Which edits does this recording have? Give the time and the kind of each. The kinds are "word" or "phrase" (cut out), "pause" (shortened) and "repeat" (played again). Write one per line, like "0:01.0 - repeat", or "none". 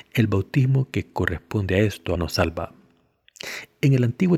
0:02.1 - word